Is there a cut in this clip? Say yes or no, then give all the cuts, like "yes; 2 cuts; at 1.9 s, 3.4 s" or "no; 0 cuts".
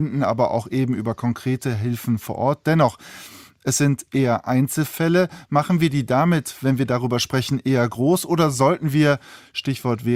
no; 0 cuts